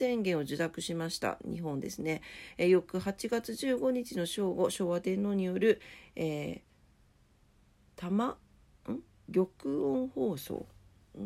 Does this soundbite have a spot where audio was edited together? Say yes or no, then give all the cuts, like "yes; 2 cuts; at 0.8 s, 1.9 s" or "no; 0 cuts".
no; 0 cuts